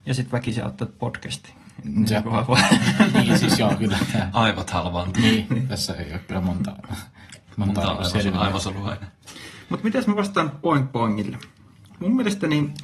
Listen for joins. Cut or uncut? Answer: uncut